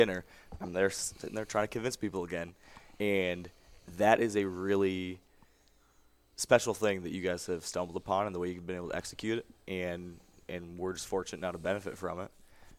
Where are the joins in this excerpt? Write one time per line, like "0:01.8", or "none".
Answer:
none